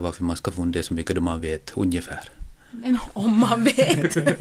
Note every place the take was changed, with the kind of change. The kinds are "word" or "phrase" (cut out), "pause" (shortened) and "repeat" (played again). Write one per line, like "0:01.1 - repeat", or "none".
none